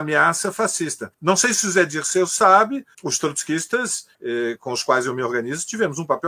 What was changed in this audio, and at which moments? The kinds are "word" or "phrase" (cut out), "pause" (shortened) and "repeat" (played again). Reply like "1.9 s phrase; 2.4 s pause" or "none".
1.1 s pause; 2.9 s word; 4.1 s pause